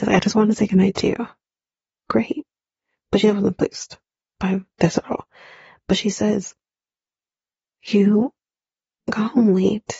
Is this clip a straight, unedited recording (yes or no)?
yes